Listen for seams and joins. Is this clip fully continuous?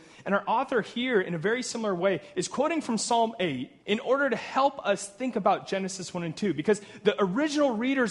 no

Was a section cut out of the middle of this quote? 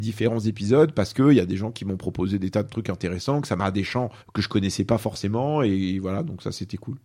yes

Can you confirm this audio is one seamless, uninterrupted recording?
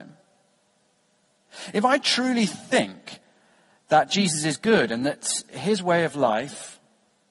yes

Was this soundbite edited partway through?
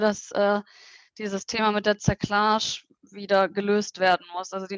no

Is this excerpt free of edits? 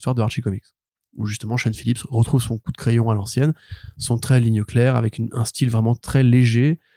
yes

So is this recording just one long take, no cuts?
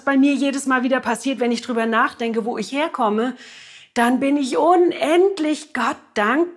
yes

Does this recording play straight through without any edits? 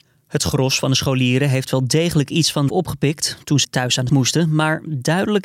no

